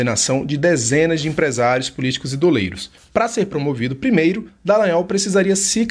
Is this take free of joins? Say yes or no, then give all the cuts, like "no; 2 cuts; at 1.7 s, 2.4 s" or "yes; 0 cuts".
yes; 0 cuts